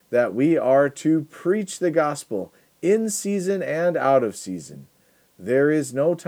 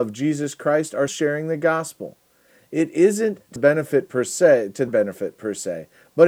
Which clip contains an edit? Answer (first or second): second